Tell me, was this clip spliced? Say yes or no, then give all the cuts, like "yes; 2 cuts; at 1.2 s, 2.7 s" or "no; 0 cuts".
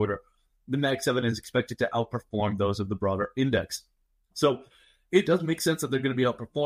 no; 0 cuts